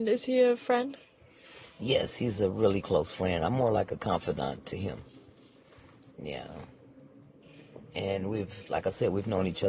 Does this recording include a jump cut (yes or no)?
no